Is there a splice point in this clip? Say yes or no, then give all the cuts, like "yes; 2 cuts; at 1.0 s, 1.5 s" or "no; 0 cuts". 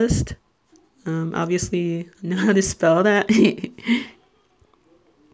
yes; 1 cut; at 2.1 s